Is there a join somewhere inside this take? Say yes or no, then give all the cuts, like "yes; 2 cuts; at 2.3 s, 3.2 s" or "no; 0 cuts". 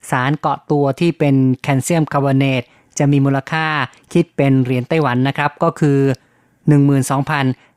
no; 0 cuts